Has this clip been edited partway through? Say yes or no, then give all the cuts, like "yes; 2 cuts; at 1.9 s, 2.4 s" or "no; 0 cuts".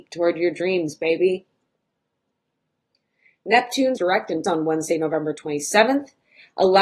yes; 2 cuts; at 4.0 s, 4.4 s